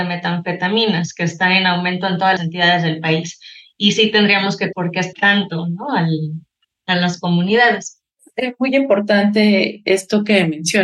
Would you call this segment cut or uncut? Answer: cut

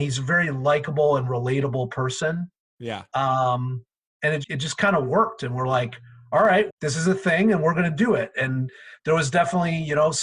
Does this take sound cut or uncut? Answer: cut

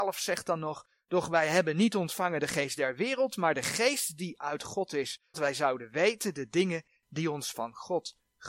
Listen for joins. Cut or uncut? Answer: cut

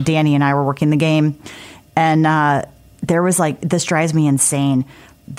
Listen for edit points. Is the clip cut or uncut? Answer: uncut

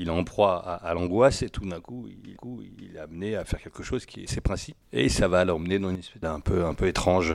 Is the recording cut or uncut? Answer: cut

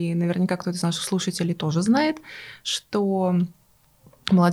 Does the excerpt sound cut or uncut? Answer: uncut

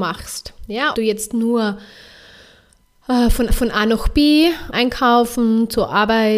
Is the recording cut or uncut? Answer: cut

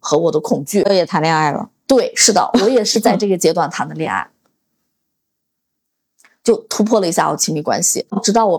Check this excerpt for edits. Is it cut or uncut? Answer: uncut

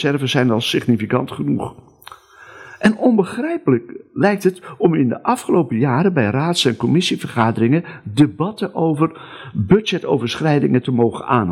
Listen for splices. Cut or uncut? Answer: uncut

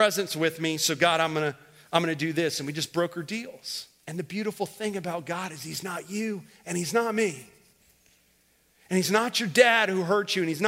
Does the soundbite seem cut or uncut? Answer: uncut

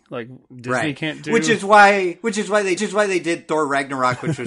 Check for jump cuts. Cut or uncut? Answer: cut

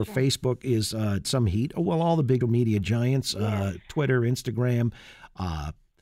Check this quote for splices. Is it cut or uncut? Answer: cut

